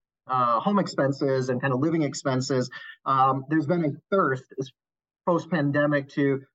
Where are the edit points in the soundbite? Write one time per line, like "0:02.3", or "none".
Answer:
none